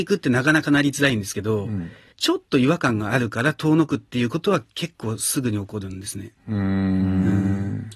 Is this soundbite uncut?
yes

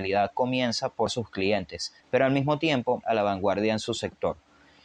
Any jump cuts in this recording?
yes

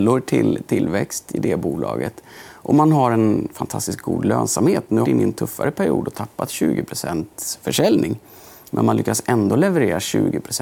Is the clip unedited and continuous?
no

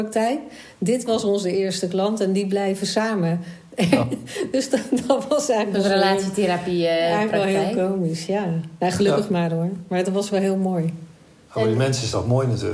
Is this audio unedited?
yes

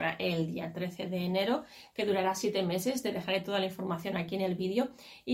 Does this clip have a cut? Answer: no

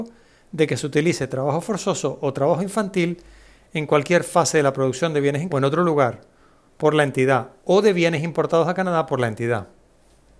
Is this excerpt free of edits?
no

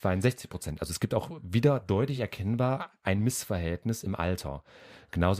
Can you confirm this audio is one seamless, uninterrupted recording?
yes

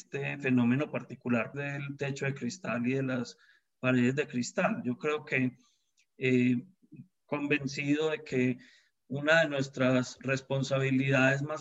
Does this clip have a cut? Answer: yes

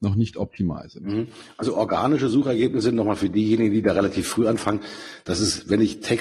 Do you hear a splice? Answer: no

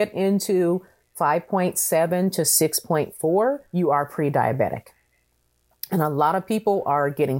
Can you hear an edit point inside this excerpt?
yes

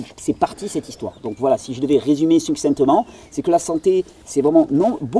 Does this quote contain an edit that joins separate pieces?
no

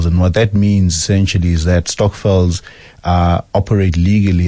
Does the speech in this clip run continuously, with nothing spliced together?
yes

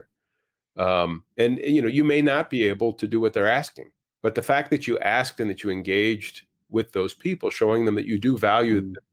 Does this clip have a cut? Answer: yes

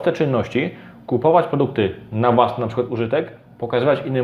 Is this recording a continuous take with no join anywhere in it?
yes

